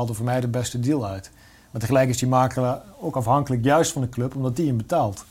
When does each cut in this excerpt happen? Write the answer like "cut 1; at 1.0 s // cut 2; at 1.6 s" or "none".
none